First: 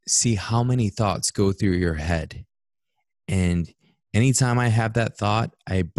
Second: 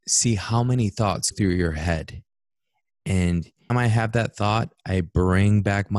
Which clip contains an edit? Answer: second; 2 cuts; at 1.3 s, 3.7 s

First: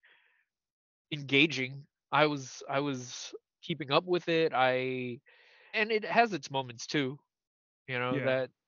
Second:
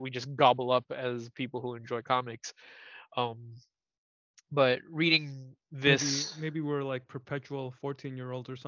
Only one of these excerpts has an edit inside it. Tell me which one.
first; 2 cuts; at 3.4 s, 5.7 s

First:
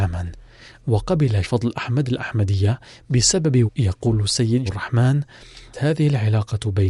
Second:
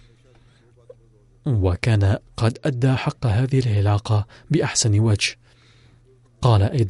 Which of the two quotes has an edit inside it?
first; 4 cuts; at 1.4 s, 3.7 s, 4.7 s, 5.7 s

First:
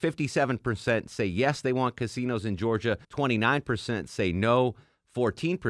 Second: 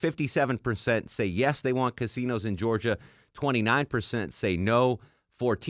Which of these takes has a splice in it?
first; 1 cut; at 3.0 s

